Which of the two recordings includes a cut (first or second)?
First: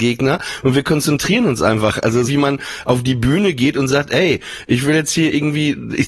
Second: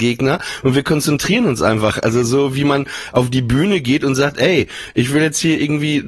first